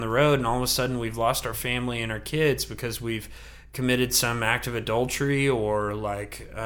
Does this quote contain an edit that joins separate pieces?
no; 0 cuts

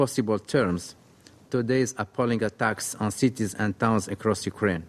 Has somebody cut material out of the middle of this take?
no; 0 cuts

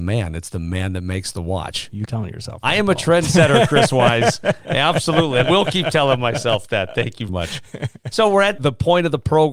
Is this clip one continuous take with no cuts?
no; 3 cuts; at 2.0 s, 5.4 s, 7.3 s

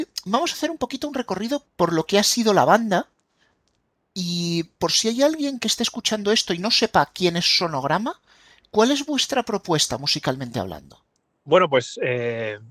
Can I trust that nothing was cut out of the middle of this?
no; 1 cut; at 1.6 s

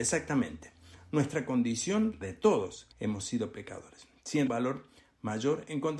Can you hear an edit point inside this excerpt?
yes; 3 cuts; at 2.2 s, 2.9 s, 4.5 s

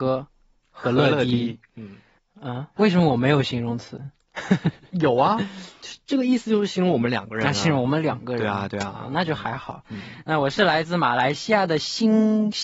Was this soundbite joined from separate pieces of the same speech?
yes; 1 cut; at 2.8 s

